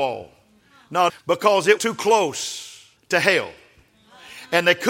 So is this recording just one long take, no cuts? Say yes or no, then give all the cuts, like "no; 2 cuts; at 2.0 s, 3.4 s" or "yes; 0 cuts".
no; 3 cuts; at 1.1 s, 1.8 s, 3.0 s